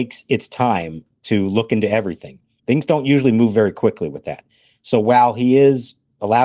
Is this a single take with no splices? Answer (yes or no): yes